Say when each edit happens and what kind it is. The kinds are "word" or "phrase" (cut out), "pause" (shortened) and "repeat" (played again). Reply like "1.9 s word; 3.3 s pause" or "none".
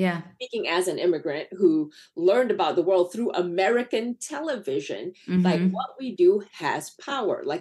none